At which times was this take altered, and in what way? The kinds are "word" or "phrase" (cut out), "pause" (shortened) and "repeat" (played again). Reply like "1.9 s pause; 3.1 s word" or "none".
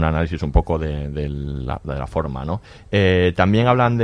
none